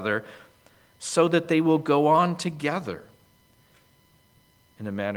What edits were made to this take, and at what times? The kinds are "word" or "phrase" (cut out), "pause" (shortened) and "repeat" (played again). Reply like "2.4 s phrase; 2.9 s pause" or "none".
none

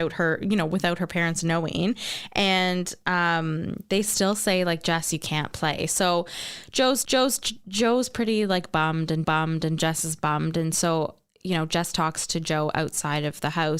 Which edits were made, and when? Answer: 7.0 s repeat; 9.2 s repeat

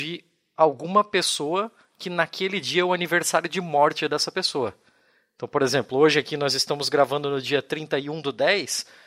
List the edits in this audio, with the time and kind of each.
none

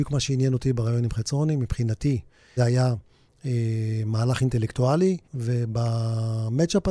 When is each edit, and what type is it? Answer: 2.6 s word; 5.2 s pause

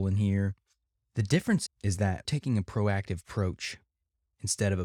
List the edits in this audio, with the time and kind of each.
1.7 s word; 2.2 s word

